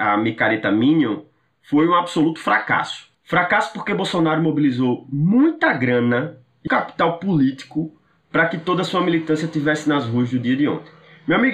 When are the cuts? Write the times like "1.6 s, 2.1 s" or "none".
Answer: 6.7 s